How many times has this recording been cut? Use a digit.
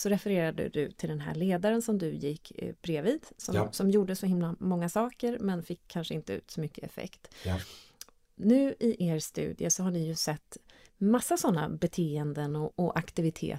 0